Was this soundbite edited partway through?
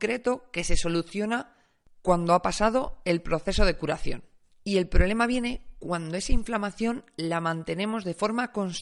no; 0 cuts

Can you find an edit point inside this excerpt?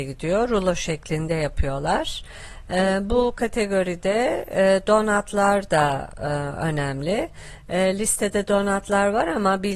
no; 0 cuts

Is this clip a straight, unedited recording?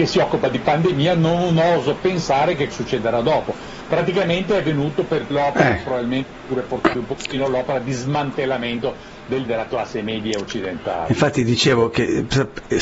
no; 4 cuts; at 2.7 s, 5.3 s, 6.9 s, 9.5 s

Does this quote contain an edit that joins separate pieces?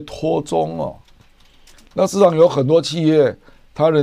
no; 0 cuts

